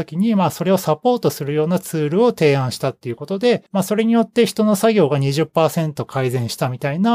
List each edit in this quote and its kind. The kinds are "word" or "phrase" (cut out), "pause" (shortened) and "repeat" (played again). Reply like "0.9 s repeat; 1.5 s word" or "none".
3.7 s pause